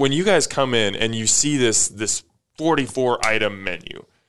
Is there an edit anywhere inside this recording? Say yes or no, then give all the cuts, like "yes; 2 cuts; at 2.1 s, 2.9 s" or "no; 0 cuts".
no; 0 cuts